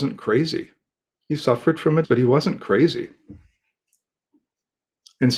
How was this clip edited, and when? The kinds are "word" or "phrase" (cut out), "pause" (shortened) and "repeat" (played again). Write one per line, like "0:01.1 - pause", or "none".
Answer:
0:02.0 - word